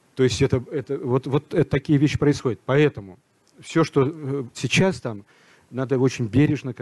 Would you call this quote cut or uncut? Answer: cut